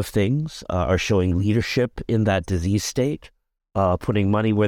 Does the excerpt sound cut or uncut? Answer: uncut